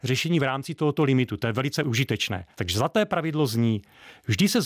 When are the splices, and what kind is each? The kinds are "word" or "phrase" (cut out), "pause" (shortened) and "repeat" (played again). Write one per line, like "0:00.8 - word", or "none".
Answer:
0:02.5 - pause